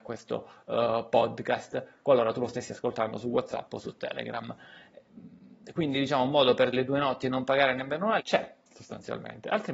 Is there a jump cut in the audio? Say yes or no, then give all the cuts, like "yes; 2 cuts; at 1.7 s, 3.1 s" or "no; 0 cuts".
yes; 2 cuts; at 6.7 s, 8.2 s